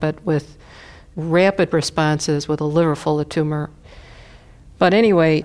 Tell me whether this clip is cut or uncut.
uncut